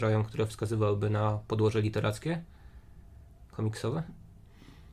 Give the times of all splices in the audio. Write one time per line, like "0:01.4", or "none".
none